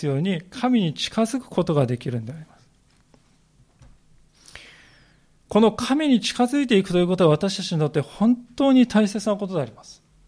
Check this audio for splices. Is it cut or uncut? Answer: uncut